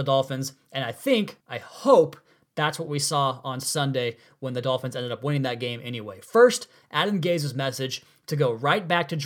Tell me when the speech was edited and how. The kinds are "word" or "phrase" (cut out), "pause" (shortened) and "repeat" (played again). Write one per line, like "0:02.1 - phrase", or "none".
0:01.4 - pause